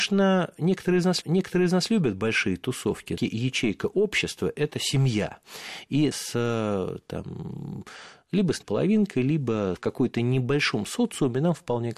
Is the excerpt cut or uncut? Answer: cut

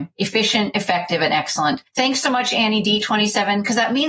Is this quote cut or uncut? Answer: uncut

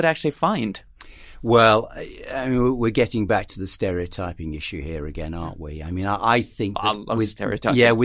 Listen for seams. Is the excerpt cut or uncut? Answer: uncut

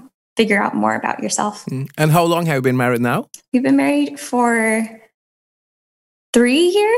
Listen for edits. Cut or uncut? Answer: uncut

